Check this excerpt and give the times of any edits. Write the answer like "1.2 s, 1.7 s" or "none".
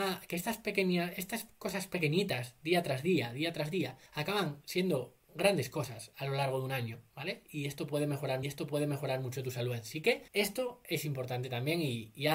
4.1 s, 5.2 s, 8.4 s, 10.3 s